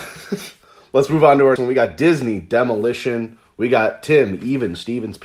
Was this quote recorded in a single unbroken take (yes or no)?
no